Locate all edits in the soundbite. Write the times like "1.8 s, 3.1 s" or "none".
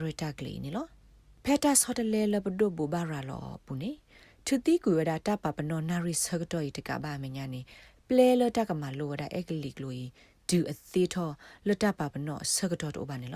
none